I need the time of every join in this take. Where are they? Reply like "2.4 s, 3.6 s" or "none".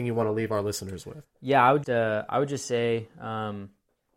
1.8 s